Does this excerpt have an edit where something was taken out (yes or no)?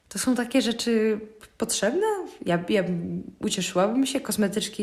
no